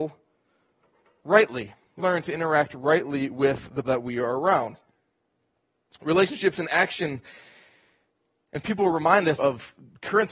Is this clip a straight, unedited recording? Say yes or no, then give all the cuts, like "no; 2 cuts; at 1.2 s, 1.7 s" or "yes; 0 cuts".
no; 3 cuts; at 2.0 s, 3.8 s, 9.4 s